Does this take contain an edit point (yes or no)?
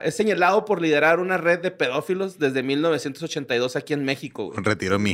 no